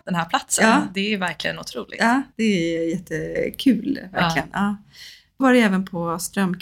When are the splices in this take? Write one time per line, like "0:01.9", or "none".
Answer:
0:02.3
0:05.4